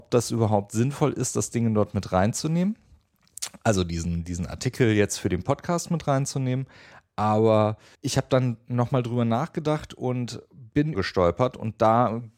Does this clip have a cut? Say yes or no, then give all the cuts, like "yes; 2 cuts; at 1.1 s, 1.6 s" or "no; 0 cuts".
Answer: yes; 2 cuts; at 7.9 s, 10.9 s